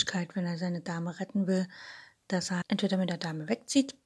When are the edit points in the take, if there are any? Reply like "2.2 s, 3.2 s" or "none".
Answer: 2.6 s